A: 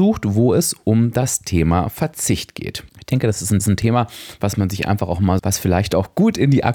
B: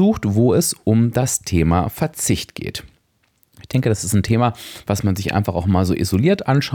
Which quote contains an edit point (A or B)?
A